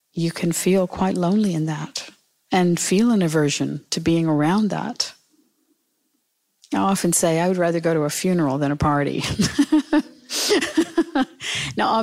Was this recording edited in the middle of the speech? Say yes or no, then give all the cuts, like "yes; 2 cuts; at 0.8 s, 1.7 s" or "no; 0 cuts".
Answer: no; 0 cuts